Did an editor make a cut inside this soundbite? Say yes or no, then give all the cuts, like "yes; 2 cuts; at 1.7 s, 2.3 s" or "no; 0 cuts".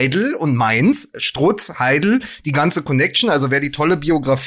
no; 0 cuts